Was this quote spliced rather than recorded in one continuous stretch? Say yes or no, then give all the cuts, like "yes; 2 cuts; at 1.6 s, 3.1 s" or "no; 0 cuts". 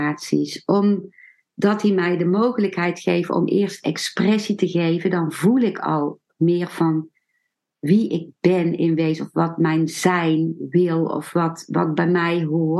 no; 0 cuts